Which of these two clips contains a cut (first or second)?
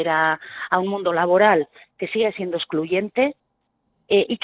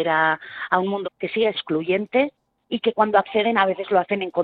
second